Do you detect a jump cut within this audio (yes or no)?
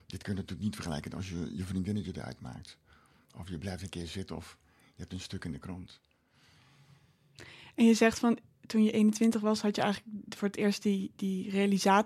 no